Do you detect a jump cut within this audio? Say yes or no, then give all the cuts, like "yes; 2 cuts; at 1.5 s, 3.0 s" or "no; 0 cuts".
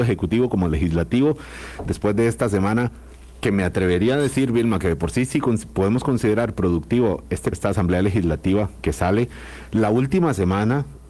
yes; 1 cut; at 7.5 s